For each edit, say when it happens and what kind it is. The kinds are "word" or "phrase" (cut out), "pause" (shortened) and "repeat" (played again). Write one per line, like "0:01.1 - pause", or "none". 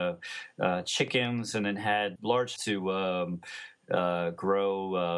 0:02.2 - word
0:02.6 - word